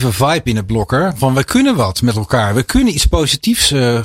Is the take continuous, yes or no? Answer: yes